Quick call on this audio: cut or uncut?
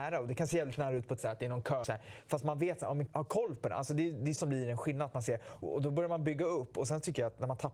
cut